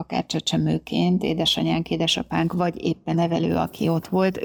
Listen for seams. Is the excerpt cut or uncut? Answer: cut